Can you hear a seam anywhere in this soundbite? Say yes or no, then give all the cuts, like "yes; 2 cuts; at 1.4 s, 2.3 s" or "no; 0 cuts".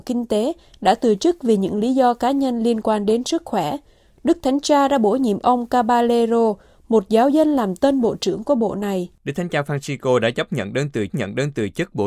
yes; 2 cuts; at 9.2 s, 11.1 s